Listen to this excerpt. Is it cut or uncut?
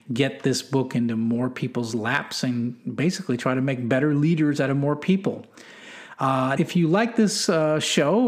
cut